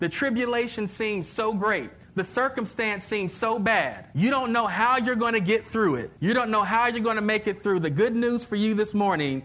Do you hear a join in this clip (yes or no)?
yes